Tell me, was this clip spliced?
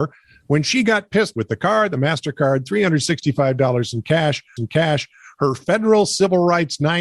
yes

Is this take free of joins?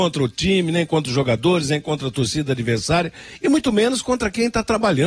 yes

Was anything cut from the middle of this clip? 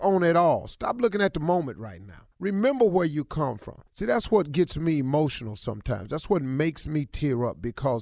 yes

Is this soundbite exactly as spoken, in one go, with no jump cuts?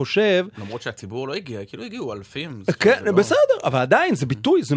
yes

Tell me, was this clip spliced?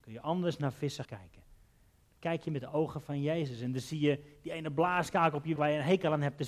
yes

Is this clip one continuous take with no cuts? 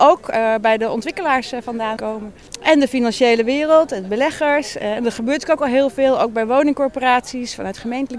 no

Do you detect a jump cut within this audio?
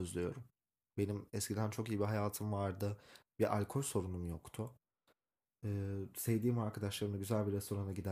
no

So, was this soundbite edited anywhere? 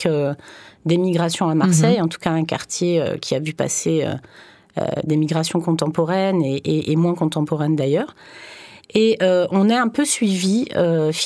no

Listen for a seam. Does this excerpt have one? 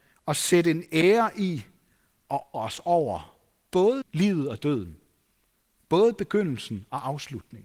yes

